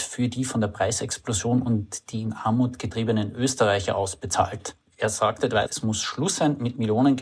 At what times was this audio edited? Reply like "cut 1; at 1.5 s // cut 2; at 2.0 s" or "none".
cut 1; at 5.7 s